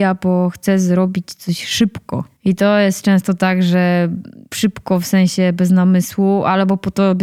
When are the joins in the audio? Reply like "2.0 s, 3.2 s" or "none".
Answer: 2.4 s, 4.5 s